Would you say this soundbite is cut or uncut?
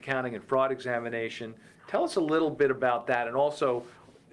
uncut